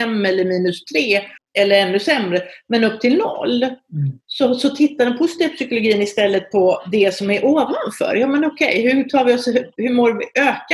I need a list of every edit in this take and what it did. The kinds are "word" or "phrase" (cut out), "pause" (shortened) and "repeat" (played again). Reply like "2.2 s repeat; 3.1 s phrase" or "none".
1.4 s pause